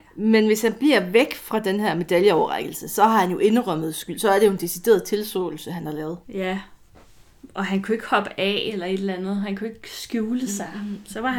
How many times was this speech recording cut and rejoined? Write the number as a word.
one